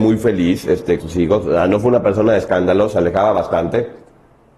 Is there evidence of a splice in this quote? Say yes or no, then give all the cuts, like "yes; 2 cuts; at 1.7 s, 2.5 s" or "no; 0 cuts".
yes; 1 cut; at 1.0 s